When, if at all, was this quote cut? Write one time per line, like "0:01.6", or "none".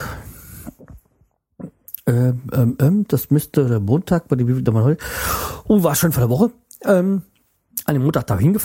none

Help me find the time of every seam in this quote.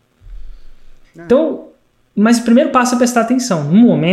none

